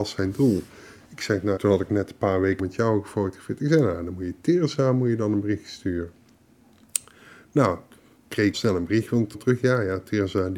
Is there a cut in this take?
yes; 4 cuts; at 1.6 s, 2.6 s, 8.5 s, 9.3 s

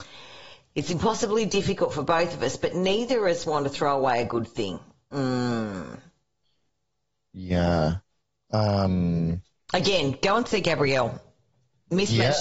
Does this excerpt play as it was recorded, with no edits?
yes; 0 cuts

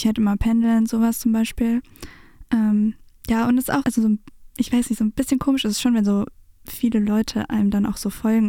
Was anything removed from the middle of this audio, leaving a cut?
yes; 1 cut; at 3.8 s

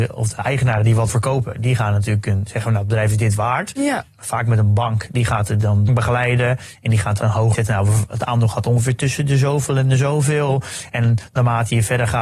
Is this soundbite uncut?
no; 4 cuts; at 1.1 s, 5.9 s, 7.2 s, 7.5 s

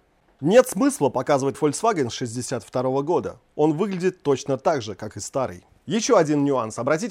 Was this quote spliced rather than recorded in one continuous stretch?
yes; 1 cut; at 1.5 s

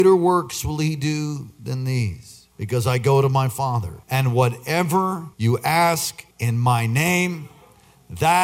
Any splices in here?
yes; 4 cuts; at 2.5 s, 4.0 s, 5.3 s, 6.3 s

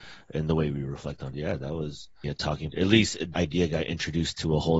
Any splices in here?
yes; 4 cuts; at 1.3 s, 2.2 s, 2.7 s, 3.3 s

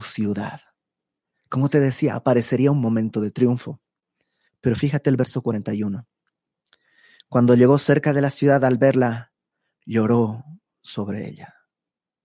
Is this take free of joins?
yes; 0 cuts

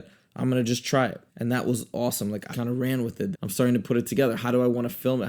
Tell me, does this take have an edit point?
yes; 3 cuts; at 1.3 s, 2.5 s, 3.3 s

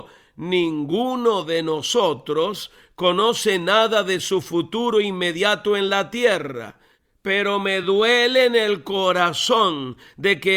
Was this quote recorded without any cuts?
yes; 0 cuts

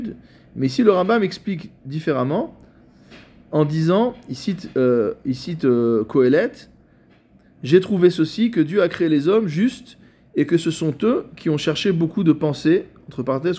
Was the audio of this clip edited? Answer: no; 0 cuts

